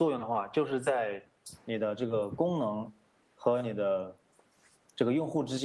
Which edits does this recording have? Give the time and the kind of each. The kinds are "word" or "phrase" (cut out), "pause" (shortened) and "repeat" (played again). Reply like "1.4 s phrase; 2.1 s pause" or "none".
none